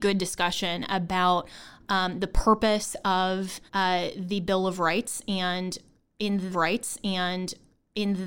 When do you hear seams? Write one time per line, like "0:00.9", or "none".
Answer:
0:03.7
0:06.5